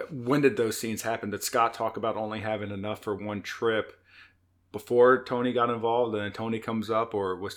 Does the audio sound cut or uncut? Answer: uncut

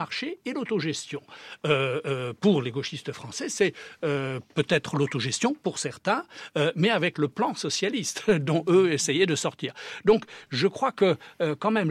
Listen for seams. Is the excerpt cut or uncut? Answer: uncut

